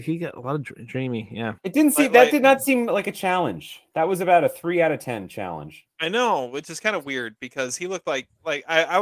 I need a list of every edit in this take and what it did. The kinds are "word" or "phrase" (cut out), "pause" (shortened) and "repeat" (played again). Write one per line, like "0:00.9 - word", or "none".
0:01.6 - pause
0:05.9 - pause